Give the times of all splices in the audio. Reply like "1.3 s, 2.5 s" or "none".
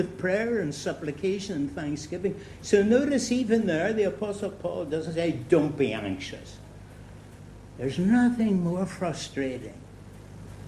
none